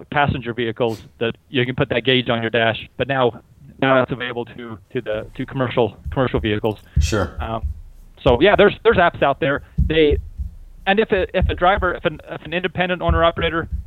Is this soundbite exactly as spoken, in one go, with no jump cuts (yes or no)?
no